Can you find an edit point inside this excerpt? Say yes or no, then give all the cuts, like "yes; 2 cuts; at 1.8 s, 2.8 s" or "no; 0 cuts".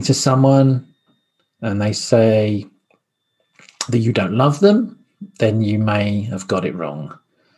no; 0 cuts